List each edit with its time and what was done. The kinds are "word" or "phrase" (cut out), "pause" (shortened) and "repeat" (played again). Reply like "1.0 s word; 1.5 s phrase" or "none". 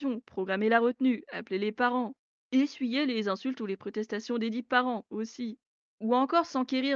none